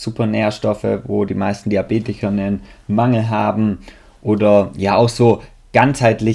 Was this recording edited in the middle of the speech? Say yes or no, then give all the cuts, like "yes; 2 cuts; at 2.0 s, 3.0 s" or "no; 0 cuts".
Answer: no; 0 cuts